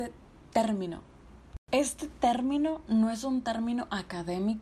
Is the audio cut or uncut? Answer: uncut